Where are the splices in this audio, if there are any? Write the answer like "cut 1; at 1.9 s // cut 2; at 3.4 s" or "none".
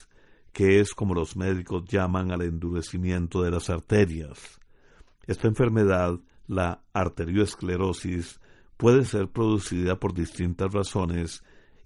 none